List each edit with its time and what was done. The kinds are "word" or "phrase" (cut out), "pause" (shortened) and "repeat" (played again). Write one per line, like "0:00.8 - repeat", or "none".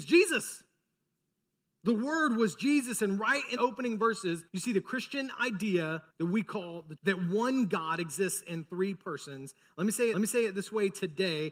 0:03.6 - word
0:04.5 - pause
0:06.1 - pause
0:07.0 - word
0:10.1 - repeat

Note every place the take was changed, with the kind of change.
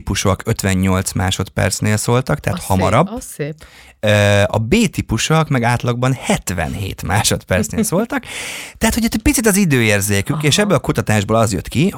none

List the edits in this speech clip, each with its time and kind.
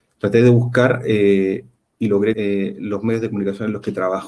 0:02.3 - word

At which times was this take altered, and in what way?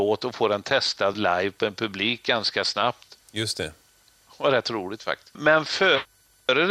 none

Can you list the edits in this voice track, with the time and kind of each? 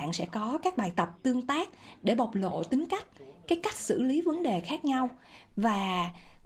none

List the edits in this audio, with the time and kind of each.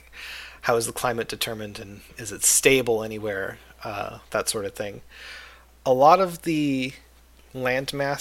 none

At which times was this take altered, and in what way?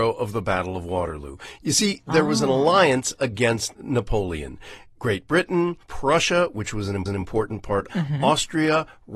0:05.8 - pause
0:07.1 - repeat
0:07.9 - phrase

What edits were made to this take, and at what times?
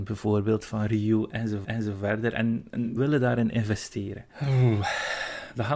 0:01.6 - repeat
0:03.0 - word
0:04.3 - pause

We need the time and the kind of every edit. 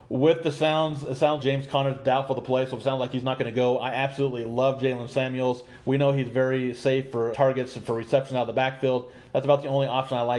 0:01.4 - word
0:07.3 - word

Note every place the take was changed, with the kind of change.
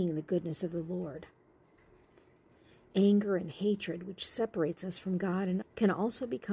0:05.6 - word

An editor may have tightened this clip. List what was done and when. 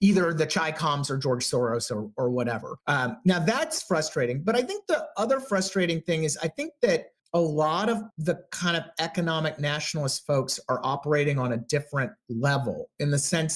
0:02.8 - pause
0:07.2 - pause
0:08.1 - pause

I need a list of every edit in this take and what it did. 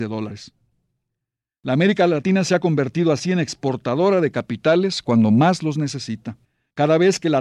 0:06.4 - pause

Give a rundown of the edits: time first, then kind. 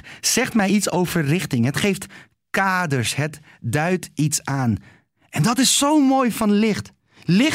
none

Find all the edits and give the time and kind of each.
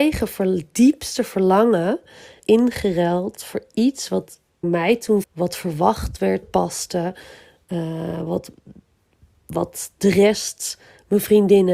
0:02.4 - word
0:04.6 - word
0:05.2 - phrase
0:06.4 - phrase

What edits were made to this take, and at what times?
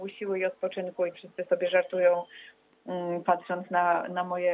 0:01.1 - word

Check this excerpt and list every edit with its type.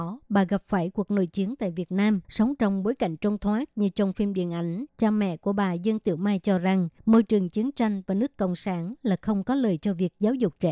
0:02.2 - pause
0:04.9 - pause
0:07.0 - pause

